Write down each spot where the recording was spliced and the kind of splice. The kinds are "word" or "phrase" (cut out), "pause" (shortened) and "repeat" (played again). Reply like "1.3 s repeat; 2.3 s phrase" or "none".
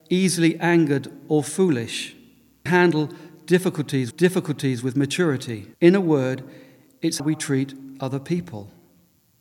2.7 s phrase; 4.1 s repeat; 5.7 s pause; 7.2 s word